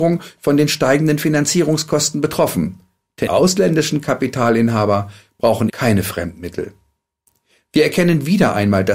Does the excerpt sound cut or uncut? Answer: cut